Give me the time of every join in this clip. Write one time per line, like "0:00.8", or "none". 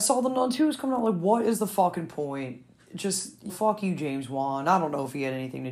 0:03.5